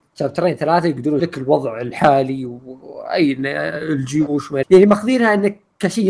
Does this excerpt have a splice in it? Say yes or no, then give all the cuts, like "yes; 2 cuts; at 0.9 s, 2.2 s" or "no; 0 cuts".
yes; 2 cuts; at 1.2 s, 4.6 s